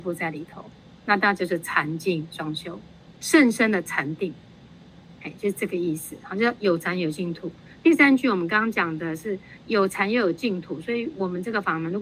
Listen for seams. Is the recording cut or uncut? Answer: cut